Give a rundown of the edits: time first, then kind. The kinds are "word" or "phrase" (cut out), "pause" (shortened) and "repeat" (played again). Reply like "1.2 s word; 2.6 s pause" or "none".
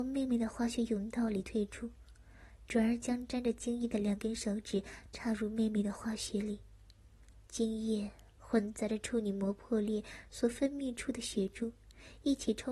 7.5 s pause